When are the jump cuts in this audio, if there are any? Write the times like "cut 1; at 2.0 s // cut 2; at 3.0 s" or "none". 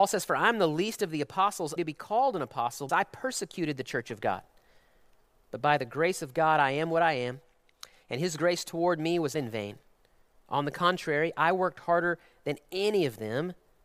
cut 1; at 1.8 s // cut 2; at 2.9 s // cut 3; at 9.3 s